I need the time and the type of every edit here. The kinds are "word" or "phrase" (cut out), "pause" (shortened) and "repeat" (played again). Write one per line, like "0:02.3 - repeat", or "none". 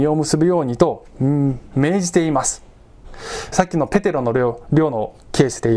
0:03.5 - phrase